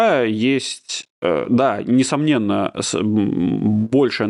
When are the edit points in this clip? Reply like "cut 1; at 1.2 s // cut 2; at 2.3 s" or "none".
none